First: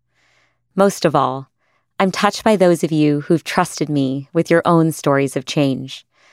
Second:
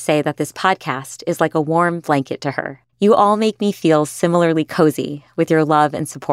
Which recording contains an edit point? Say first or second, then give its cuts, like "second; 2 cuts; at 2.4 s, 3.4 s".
second; 1 cut; at 2.9 s